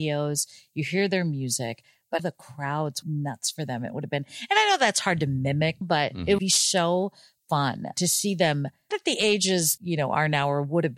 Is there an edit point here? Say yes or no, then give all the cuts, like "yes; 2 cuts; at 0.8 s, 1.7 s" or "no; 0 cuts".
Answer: yes; 7 cuts; at 2.2 s, 3.0 s, 5.8 s, 6.4 s, 7.9 s, 8.9 s, 9.8 s